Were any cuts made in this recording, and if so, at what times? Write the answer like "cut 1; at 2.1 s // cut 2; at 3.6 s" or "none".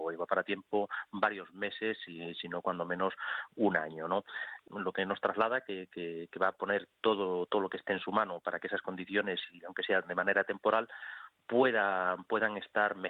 none